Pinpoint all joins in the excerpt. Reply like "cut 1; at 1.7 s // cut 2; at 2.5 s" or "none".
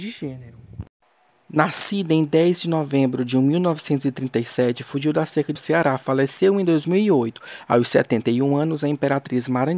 cut 1; at 5.6 s

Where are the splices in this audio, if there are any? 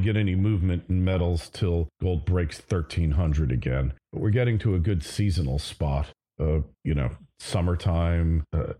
none

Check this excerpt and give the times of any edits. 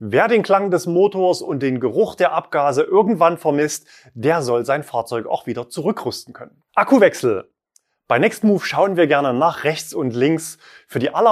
cut 1; at 6.7 s

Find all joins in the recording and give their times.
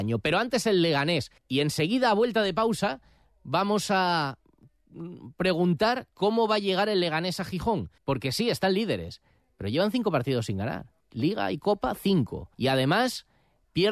cut 1; at 1.4 s // cut 2; at 8.0 s // cut 3; at 11.0 s // cut 4; at 12.5 s

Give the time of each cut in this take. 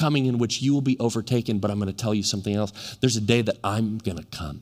none

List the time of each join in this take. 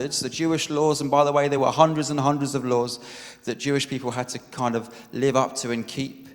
none

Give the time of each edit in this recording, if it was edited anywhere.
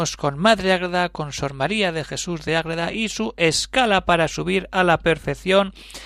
none

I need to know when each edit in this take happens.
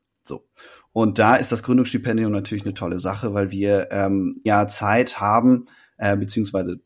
cut 1; at 4.5 s

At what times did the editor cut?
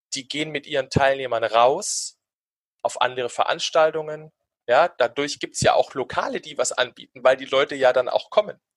none

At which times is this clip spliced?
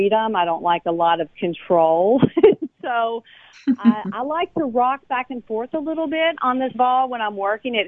cut 1; at 6.7 s

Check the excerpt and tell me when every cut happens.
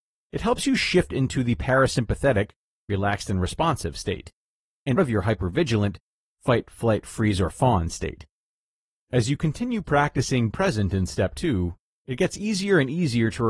cut 1; at 5.0 s // cut 2; at 10.5 s

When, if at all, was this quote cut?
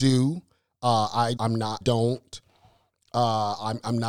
cut 1; at 1.4 s // cut 2; at 1.8 s

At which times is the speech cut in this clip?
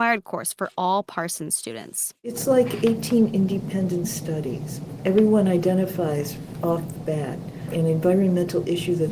none

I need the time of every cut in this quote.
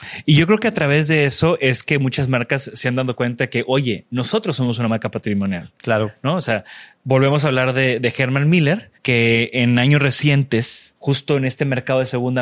cut 1; at 8.9 s // cut 2; at 11.0 s

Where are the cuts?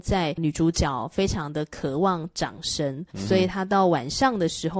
cut 1; at 3.1 s

